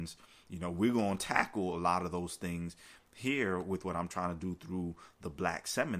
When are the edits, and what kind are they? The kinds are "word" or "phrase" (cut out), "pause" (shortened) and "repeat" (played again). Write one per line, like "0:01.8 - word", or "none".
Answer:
none